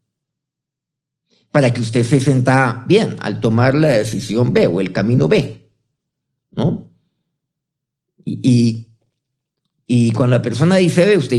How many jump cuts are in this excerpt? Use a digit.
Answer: 0